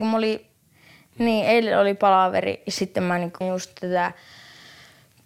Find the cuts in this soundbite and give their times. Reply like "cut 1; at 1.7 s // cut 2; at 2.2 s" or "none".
cut 1; at 3.4 s